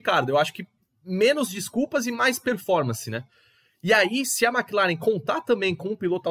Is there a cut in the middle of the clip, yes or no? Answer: no